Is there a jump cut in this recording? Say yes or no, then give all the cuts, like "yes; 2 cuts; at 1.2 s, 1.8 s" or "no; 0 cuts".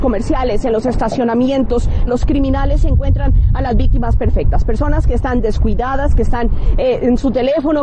yes; 1 cut; at 2.1 s